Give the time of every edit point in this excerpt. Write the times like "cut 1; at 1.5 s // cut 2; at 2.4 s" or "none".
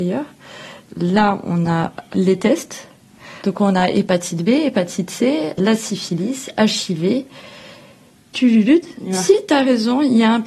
cut 1; at 5.6 s